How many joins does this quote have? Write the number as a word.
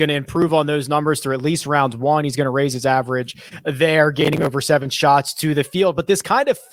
zero